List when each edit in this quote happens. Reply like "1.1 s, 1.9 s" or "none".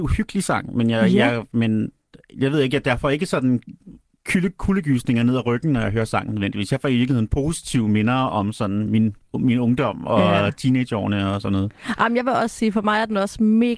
none